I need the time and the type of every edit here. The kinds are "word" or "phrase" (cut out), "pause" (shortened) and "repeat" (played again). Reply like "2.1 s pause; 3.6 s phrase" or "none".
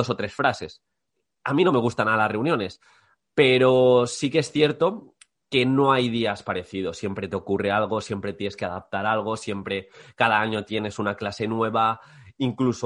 none